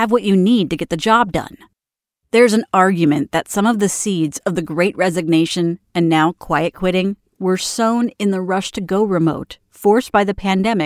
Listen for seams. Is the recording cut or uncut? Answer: uncut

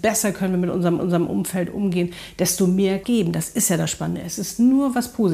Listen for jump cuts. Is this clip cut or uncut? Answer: cut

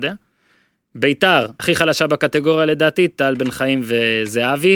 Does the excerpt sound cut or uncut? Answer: cut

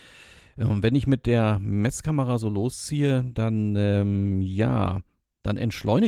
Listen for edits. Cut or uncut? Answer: uncut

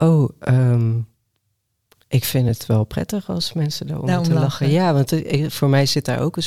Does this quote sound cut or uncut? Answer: uncut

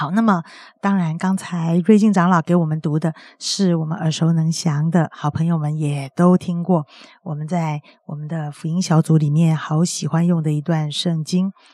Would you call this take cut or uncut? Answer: uncut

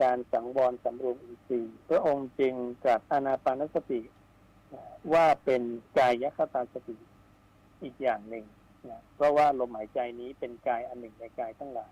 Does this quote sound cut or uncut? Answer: cut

